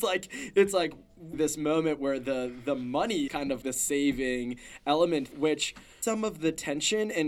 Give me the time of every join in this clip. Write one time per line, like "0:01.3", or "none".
0:01.3
0:03.3
0:03.6
0:05.3
0:06.0

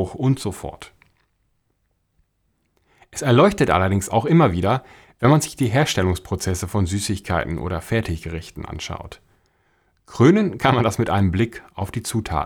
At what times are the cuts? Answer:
none

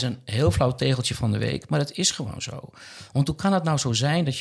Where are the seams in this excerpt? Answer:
none

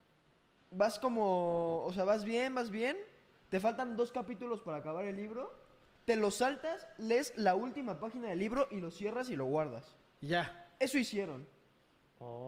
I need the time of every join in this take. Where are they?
none

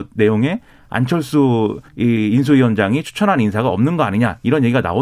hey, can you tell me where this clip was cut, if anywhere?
0:01.9

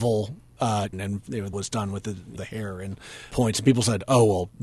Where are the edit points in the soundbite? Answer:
0:00.9
0:01.5
0:02.4
0:03.3

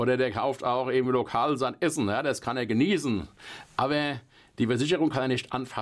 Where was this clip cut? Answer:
none

